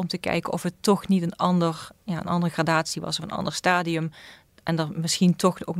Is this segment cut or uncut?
uncut